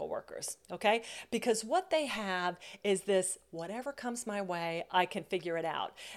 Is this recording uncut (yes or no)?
yes